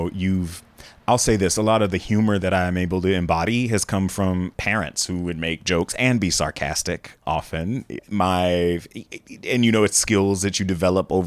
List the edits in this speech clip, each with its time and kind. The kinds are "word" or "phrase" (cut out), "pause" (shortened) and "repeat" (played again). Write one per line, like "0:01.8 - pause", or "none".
0:04.5 - word

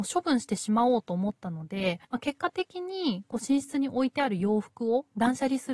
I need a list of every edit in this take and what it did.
0:02.0 - pause

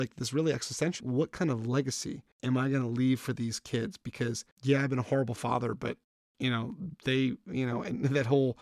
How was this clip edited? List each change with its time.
0:01.0 - word
0:02.3 - pause
0:04.5 - pause

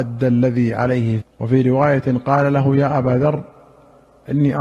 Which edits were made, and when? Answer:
0:01.2 - word

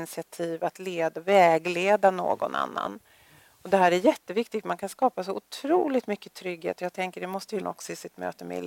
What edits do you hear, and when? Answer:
0:07.6 - word

